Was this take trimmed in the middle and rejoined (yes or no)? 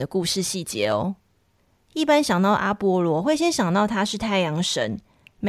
no